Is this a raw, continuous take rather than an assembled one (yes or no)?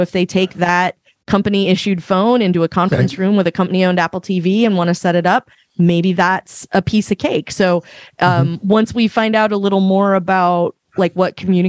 yes